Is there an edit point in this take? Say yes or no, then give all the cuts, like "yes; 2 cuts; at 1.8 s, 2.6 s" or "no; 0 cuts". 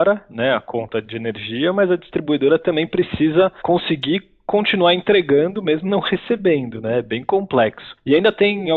no; 0 cuts